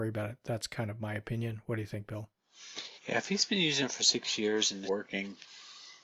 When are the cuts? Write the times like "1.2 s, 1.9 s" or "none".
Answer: 3.0 s, 4.9 s